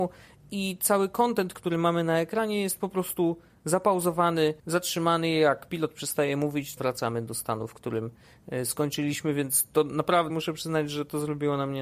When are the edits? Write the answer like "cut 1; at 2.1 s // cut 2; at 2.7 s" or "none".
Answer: cut 1; at 4.6 s // cut 2; at 6.8 s // cut 3; at 10.3 s